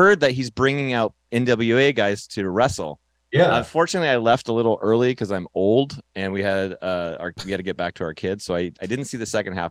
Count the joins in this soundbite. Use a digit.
0